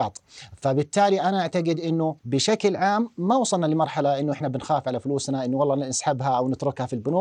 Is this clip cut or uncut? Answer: cut